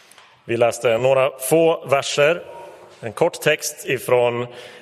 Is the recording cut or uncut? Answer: uncut